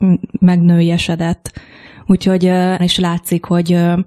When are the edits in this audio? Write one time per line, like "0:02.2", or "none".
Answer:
0:02.8